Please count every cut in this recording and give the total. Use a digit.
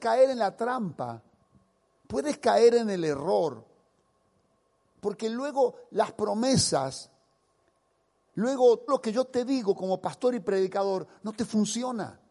1